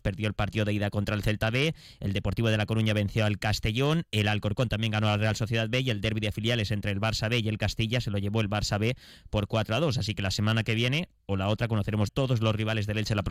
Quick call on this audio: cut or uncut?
cut